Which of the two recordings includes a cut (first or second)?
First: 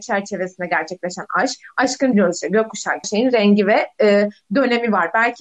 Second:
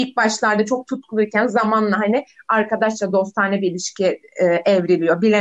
first